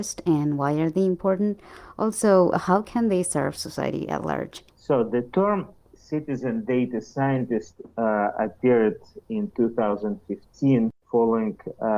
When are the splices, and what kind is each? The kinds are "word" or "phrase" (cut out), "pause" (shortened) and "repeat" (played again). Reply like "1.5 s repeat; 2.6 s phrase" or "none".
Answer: 4.7 s pause; 11.0 s pause